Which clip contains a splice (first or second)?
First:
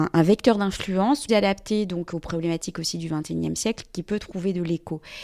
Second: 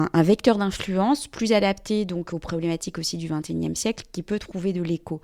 first